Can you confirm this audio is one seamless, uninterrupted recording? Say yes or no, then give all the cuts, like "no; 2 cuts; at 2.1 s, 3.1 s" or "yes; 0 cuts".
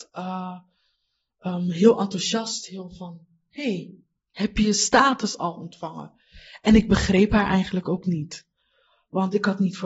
yes; 0 cuts